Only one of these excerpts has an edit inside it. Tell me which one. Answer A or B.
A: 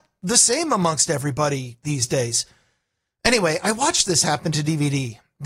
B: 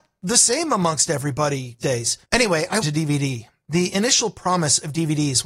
B